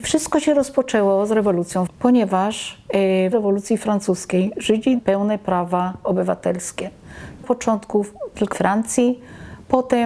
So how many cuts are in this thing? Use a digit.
5